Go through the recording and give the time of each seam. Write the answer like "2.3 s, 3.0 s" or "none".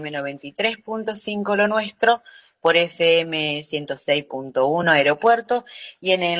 none

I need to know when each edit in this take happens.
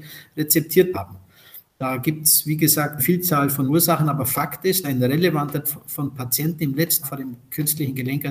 0.9 s, 3.0 s, 3.7 s, 4.8 s, 5.6 s, 7.0 s

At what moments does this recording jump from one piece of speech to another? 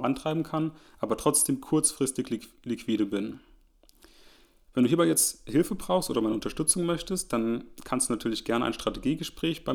none

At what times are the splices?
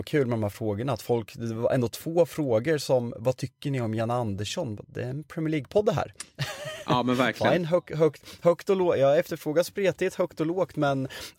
none

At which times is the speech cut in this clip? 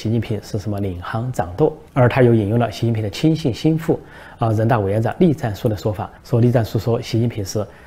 1.9 s, 6.2 s

